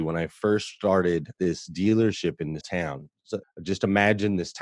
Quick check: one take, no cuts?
no; 3 cuts; at 1.4 s, 2.6 s, 3.4 s

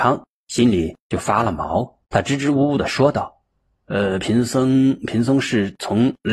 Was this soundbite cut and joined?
yes; 1 cut; at 2.0 s

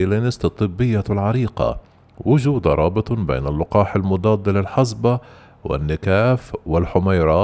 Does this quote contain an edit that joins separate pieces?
no; 0 cuts

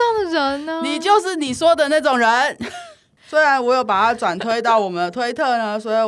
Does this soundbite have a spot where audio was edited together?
no; 0 cuts

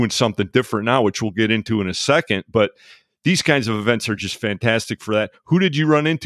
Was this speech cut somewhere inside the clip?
no; 0 cuts

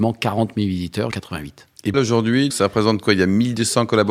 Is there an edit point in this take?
yes; 3 cuts; at 1.1 s, 1.9 s, 2.5 s

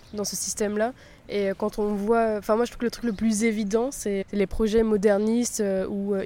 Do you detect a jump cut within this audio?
yes; 1 cut; at 4.2 s

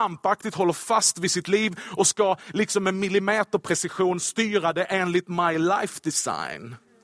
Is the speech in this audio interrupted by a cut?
no; 0 cuts

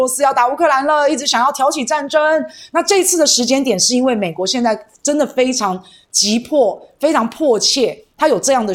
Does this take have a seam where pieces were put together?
no; 0 cuts

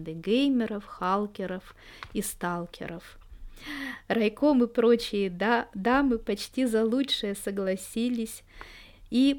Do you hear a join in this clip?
no; 0 cuts

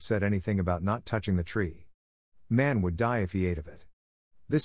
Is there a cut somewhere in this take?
no; 0 cuts

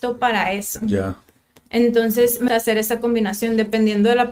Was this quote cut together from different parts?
yes; 1 cut; at 2.5 s

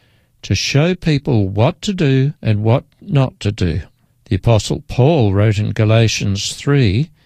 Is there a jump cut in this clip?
yes; 2 cuts; at 2.4 s, 4.1 s

